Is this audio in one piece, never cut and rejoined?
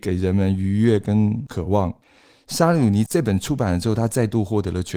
yes; 0 cuts

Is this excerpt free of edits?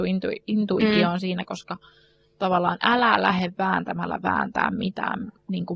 yes; 0 cuts

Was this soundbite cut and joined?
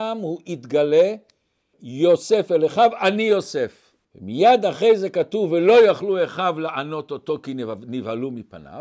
yes; 2 cuts; at 1.7 s, 4.0 s

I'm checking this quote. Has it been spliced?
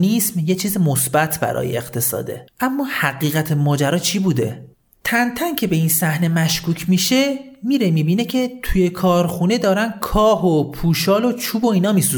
no; 0 cuts

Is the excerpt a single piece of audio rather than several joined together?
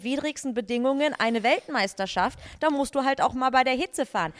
yes; 0 cuts

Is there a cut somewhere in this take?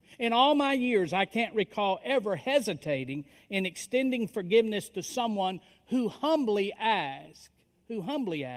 no; 0 cuts

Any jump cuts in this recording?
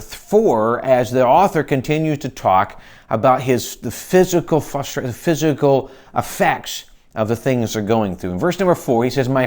no; 0 cuts

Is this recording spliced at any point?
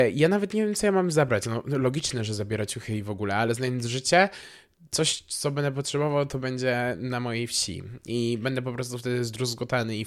no; 0 cuts

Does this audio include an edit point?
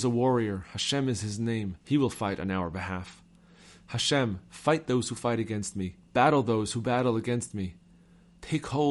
yes; 2 cuts; at 1.8 s, 6.0 s

